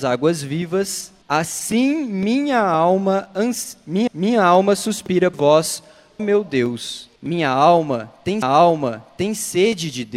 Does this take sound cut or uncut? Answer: cut